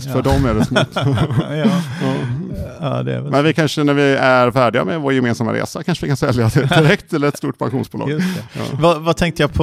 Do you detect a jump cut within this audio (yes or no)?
no